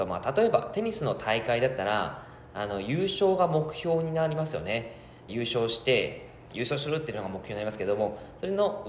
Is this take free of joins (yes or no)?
no